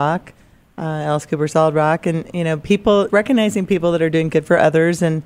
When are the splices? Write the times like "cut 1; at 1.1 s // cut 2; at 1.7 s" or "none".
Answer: cut 1; at 3.1 s